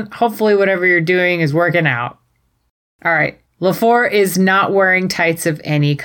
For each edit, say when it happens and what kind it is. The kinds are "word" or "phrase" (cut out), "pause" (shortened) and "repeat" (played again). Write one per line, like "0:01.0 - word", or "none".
none